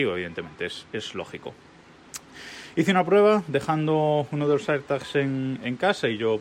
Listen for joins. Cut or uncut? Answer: uncut